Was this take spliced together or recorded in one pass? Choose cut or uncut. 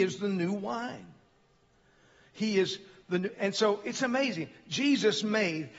uncut